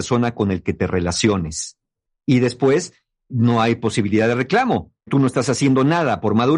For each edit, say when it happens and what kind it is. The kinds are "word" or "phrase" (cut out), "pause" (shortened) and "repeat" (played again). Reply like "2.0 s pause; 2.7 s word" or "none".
3.3 s word; 5.1 s word